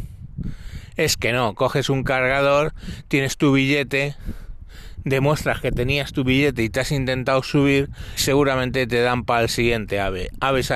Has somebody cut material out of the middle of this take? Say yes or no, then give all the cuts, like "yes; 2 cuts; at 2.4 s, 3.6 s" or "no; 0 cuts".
yes; 1 cut; at 8.2 s